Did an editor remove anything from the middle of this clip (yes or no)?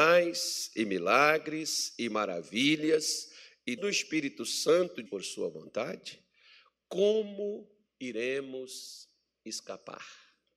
yes